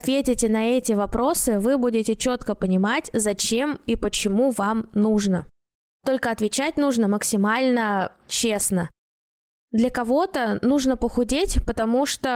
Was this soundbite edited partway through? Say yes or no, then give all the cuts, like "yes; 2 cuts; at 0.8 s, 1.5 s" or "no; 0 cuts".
no; 0 cuts